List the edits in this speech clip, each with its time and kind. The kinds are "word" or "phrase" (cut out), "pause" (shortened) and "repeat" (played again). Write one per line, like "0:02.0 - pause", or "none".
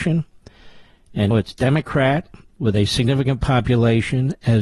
0:01.3 - word